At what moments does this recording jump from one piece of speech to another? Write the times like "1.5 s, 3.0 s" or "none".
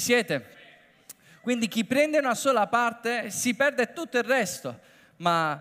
none